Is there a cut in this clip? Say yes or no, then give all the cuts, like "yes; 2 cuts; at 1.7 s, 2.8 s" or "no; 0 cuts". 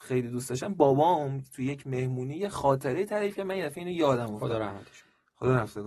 no; 0 cuts